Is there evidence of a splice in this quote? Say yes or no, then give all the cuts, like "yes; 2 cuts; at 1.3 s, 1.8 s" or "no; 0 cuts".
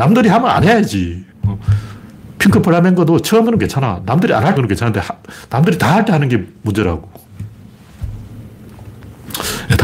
yes; 3 cuts; at 1.3 s, 3.5 s, 4.6 s